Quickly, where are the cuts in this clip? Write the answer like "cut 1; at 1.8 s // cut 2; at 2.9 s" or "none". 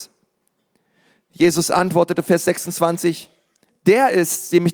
none